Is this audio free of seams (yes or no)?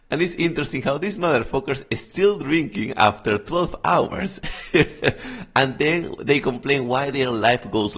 yes